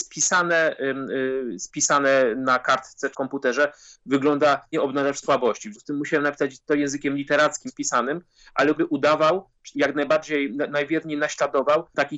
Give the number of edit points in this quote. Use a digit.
7